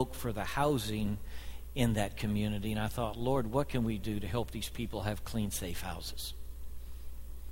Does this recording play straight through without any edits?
yes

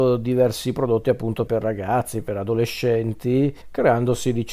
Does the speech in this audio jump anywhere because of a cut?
yes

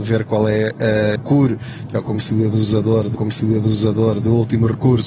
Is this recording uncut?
no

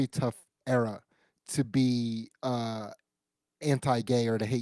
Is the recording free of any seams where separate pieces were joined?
yes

